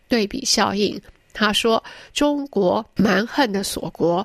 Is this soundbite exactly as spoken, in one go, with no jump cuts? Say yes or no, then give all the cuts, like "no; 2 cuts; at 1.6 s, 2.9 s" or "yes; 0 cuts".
yes; 0 cuts